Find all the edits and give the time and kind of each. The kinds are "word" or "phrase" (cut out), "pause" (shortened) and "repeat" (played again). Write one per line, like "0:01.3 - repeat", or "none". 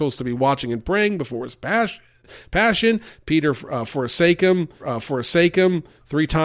0:04.8 - repeat